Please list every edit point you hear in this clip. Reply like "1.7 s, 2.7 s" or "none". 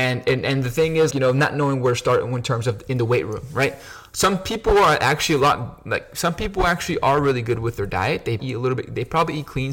1.1 s, 8.4 s